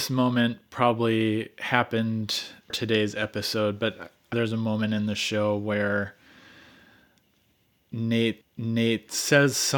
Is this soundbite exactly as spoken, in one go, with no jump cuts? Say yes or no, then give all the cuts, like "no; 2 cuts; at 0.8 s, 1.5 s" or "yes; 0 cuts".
no; 3 cuts; at 2.7 s, 4.3 s, 8.4 s